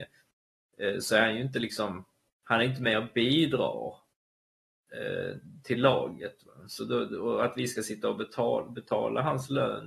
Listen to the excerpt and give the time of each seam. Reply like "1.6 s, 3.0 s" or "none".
none